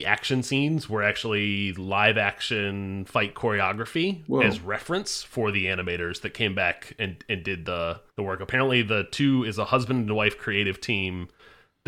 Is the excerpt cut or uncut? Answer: cut